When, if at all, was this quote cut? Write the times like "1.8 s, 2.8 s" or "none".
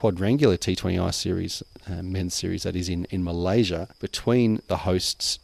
none